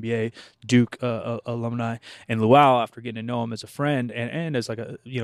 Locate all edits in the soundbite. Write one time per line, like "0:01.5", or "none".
none